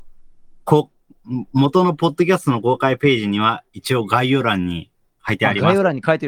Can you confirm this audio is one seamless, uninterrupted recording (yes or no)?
yes